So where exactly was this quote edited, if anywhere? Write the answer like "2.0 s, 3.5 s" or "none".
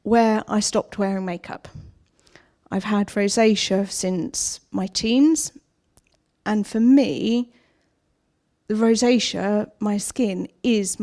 none